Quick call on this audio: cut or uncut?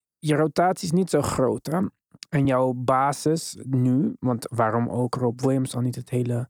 uncut